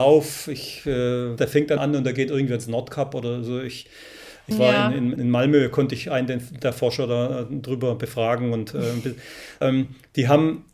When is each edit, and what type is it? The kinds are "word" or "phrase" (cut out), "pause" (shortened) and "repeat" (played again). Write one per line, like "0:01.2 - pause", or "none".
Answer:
0:01.4 - phrase
0:01.8 - phrase
0:04.5 - phrase
0:05.2 - word
0:09.6 - word